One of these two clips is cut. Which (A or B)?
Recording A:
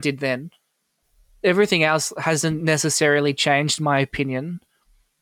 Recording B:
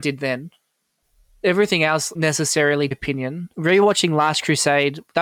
B